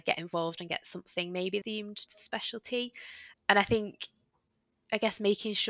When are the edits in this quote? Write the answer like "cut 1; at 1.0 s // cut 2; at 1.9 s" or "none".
cut 1; at 1.6 s // cut 2; at 2.1 s // cut 3; at 3.3 s

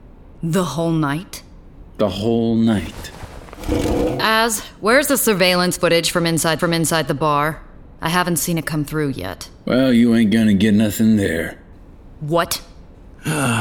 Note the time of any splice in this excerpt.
cut 1; at 6.6 s

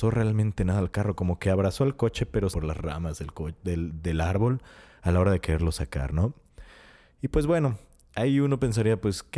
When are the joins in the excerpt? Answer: cut 1; at 2.5 s

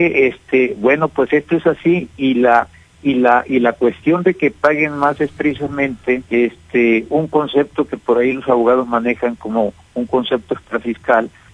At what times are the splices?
cut 1; at 6.3 s

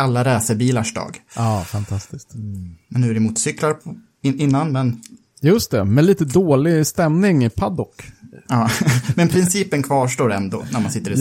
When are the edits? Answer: none

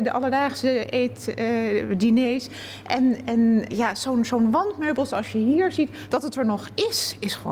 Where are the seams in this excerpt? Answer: cut 1; at 3.7 s

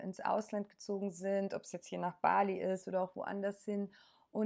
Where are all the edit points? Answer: none

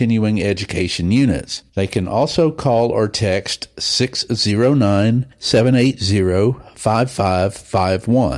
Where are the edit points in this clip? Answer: cut 1; at 1.7 s

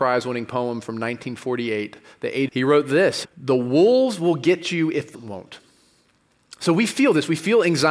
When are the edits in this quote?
cut 1; at 2.5 s // cut 2; at 3.2 s // cut 3; at 5.1 s

